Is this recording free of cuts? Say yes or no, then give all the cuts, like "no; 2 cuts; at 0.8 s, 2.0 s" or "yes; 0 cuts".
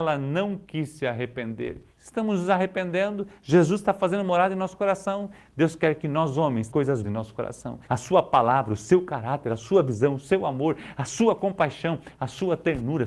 no; 4 cuts; at 1.9 s, 6.7 s, 7.0 s, 7.8 s